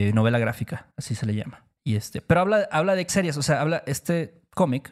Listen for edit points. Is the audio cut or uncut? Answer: cut